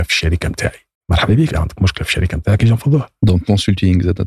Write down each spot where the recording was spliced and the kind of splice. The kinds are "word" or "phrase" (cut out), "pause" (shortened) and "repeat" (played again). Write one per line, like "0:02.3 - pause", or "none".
0:01.0 - pause
0:01.5 - word